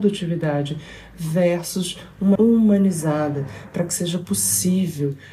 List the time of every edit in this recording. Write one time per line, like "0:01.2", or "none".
0:02.4